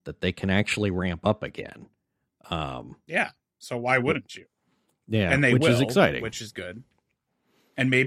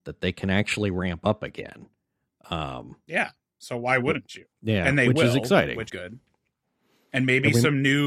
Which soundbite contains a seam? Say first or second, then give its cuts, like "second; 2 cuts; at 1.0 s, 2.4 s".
second; 2 cuts; at 4.5 s, 5.9 s